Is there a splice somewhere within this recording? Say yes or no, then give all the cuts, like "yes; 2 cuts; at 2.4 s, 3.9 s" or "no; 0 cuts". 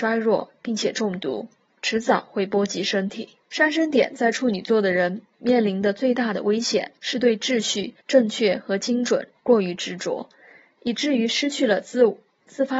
yes; 4 cuts; at 1.6 s, 3.4 s, 7.0 s, 8.0 s